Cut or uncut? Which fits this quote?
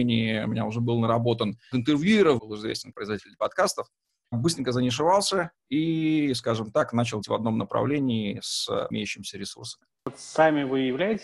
cut